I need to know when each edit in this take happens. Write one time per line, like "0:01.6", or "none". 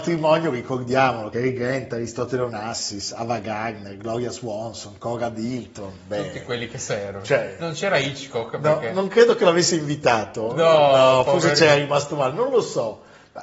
none